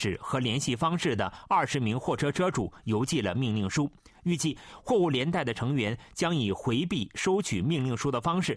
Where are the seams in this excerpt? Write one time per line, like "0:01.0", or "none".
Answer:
none